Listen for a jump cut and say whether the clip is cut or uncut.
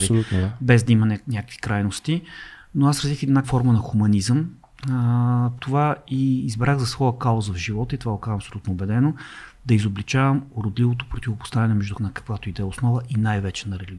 cut